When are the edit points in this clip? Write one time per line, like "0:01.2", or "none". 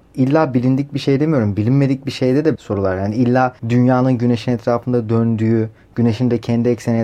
0:02.5
0:03.6